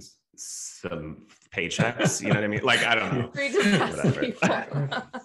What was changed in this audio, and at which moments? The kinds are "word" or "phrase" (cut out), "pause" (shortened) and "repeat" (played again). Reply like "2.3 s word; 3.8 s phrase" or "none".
none